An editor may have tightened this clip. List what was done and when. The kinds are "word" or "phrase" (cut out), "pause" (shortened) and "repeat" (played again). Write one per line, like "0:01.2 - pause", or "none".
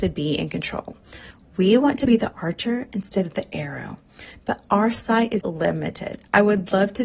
0:05.4 - word

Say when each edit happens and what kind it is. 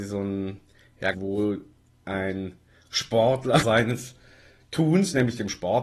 0:01.1 - phrase
0:03.6 - word

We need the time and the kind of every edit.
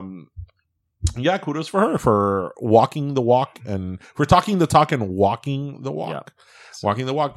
none

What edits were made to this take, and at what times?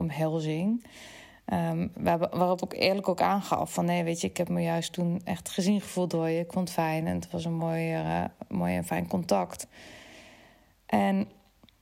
none

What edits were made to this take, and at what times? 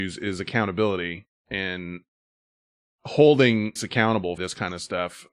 0:03.8 - word
0:04.4 - word

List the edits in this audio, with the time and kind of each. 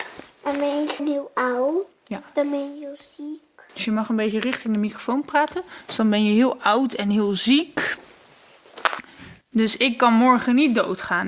0:01.0 - word
0:03.7 - pause
0:09.4 - pause

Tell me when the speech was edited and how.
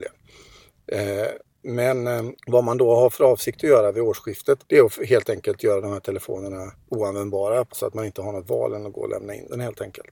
0:02.4 - pause
0:04.6 - pause
0:06.8 - pause
0:07.7 - word

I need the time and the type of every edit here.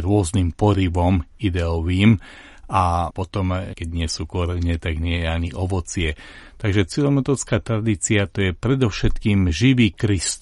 none

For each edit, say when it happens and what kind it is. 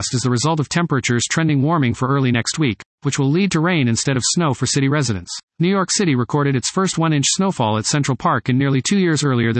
0:05.5 - pause

